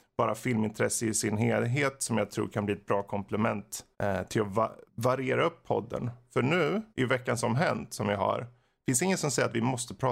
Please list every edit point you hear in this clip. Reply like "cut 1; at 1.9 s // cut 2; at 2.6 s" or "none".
cut 1; at 3.9 s // cut 2; at 4.9 s // cut 3; at 6.9 s